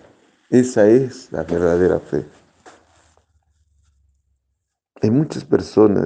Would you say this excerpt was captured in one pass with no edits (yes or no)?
yes